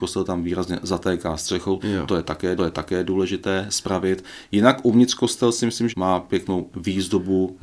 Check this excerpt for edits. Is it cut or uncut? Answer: cut